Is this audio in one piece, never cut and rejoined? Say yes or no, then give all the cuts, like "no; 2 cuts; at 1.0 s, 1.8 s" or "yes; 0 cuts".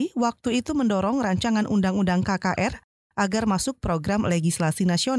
yes; 0 cuts